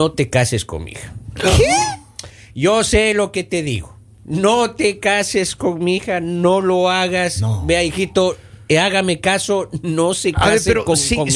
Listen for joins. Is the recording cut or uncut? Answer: uncut